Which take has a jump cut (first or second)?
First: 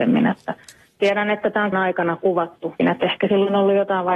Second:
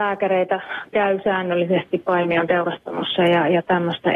first